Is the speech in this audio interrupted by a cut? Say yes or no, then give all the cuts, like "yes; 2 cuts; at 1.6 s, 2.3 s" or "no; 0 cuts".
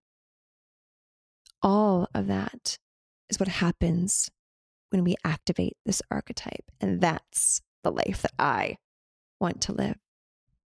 no; 0 cuts